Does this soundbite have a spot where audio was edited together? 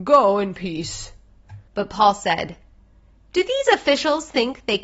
yes; 1 cut; at 1.7 s

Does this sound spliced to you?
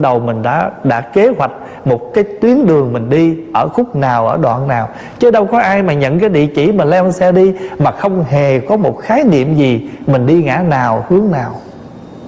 no; 0 cuts

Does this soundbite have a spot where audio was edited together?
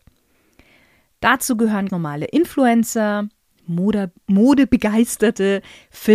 yes; 1 cut; at 1.9 s

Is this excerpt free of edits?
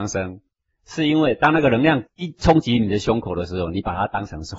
yes; 0 cuts

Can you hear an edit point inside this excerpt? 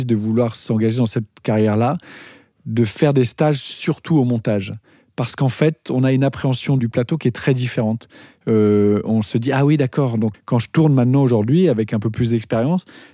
yes; 2 cuts; at 6.8 s, 10.3 s

